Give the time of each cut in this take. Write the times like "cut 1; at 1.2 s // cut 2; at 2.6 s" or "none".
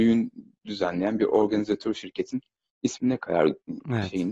none